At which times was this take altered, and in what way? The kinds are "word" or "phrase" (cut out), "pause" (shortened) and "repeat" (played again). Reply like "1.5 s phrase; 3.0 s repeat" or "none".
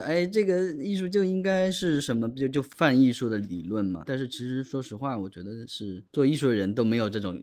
6.1 s pause

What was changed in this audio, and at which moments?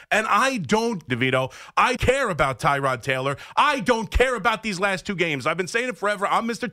1.1 s phrase; 2.0 s word

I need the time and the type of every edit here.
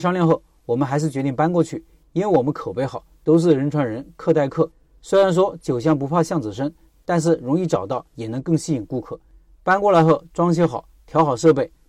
none

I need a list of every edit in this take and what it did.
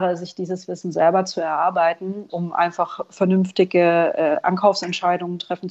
2.3 s word

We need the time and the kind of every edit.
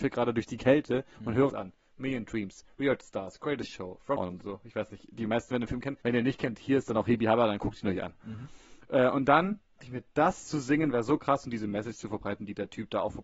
1.5 s phrase; 4.2 s word; 6.0 s pause; 9.8 s word

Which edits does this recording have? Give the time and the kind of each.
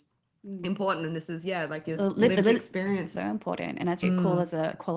2.0 s phrase; 3.2 s phrase; 4.0 s word

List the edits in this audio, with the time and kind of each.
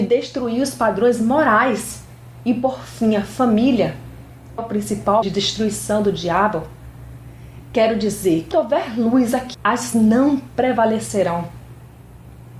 4.6 s phrase; 5.2 s word; 8.5 s word; 9.5 s phrase; 9.9 s word

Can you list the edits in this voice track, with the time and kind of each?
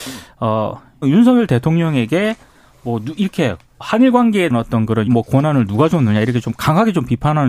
1.0 s word; 3.8 s word; 4.5 s word; 5.1 s word

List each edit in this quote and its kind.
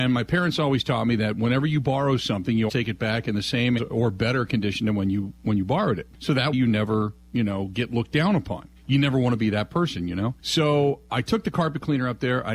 2.7 s word; 3.8 s word; 6.1 s pause; 6.5 s word; 8.8 s pause; 10.4 s pause

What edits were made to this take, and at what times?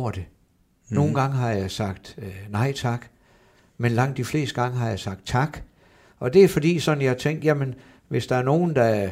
none

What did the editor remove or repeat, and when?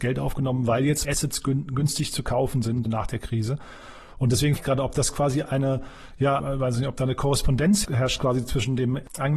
1.0 s word; 2.9 s word; 4.6 s word; 6.4 s phrase; 7.8 s word

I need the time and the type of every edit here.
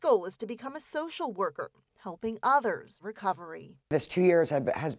3.0 s word

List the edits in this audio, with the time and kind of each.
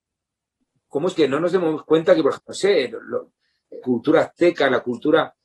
1.2 s word; 2.3 s word; 3.8 s phrase

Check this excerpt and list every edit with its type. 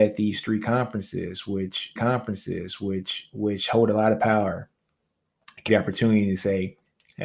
2.0 s repeat; 5.7 s word

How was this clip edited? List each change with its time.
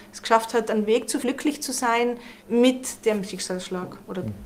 1.2 s word; 2.4 s pause

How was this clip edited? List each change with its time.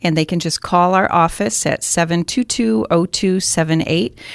none

